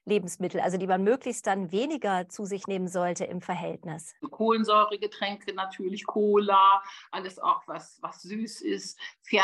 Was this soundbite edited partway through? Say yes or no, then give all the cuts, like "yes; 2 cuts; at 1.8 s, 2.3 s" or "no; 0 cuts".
yes; 1 cut; at 4.2 s